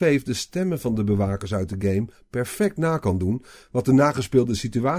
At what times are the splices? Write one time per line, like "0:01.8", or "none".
none